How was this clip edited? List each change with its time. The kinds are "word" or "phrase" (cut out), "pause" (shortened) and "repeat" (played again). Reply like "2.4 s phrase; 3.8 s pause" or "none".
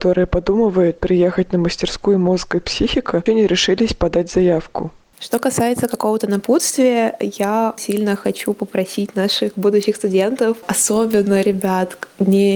3.3 s phrase; 7.8 s word

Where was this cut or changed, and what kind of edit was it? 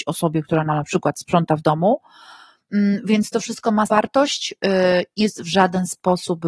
3.9 s phrase; 5.2 s word

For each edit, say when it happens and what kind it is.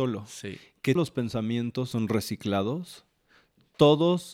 1.0 s word; 1.9 s word

